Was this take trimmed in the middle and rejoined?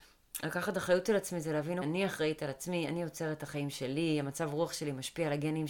yes; 1 cut; at 1.8 s

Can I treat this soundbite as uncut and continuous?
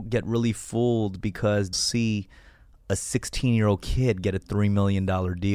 no; 1 cut; at 1.7 s

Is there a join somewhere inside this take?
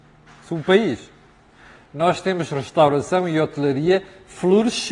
no; 0 cuts

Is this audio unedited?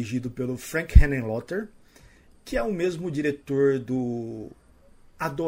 yes; 0 cuts

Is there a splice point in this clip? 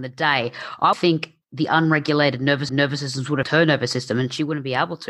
yes; 4 cuts; at 0.9 s, 1.4 s, 2.7 s, 3.4 s

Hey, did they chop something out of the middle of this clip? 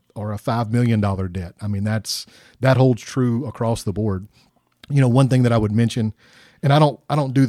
no; 0 cuts

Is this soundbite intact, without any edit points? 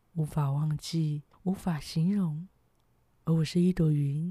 no; 1 cut; at 1.3 s

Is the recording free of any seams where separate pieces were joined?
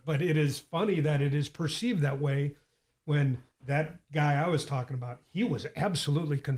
no; 1 cut; at 3.5 s

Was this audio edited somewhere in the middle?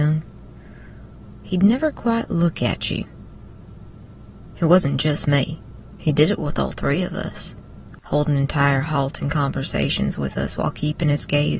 no; 0 cuts

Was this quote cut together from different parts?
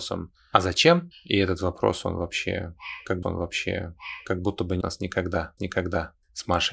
yes; 3 cuts; at 3.2 s, 4.8 s, 5.6 s

